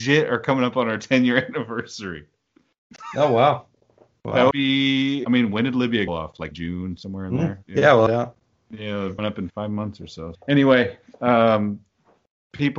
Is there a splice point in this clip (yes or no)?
yes